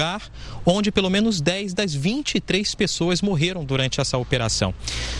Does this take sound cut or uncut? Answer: uncut